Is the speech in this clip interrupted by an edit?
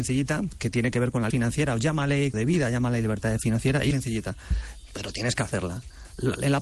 yes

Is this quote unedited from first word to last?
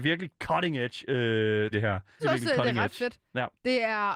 no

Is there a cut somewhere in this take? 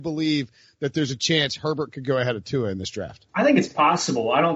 yes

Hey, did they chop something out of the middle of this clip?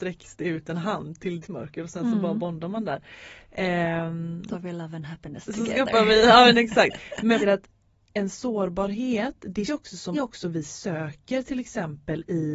yes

